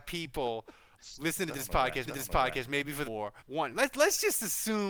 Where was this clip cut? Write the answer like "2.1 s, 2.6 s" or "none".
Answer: 1.0 s, 2.1 s, 3.0 s, 3.4 s